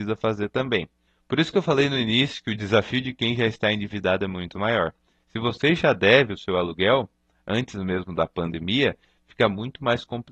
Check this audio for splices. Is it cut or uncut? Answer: uncut